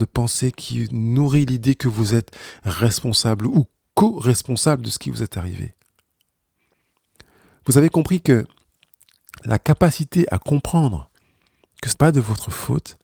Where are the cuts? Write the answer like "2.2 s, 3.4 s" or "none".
11.9 s